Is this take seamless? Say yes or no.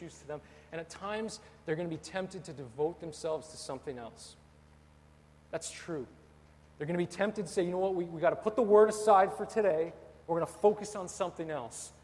yes